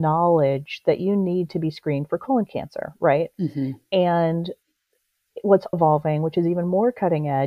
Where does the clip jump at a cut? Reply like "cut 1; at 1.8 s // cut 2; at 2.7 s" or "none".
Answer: cut 1; at 5.7 s